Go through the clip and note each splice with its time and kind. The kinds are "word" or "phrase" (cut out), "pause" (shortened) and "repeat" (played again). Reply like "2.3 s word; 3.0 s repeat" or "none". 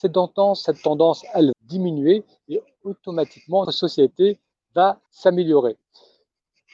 1.5 s word; 3.6 s word; 5.1 s pause